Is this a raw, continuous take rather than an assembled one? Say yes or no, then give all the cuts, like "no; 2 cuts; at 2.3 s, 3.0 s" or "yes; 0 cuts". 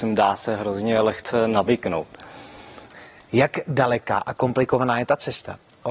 yes; 0 cuts